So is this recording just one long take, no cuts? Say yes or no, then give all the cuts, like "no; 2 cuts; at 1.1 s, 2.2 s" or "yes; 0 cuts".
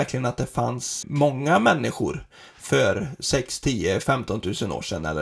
no; 1 cut; at 1.0 s